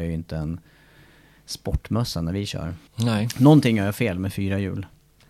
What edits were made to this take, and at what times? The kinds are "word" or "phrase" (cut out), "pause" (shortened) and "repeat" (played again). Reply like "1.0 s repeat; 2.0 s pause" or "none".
2.9 s pause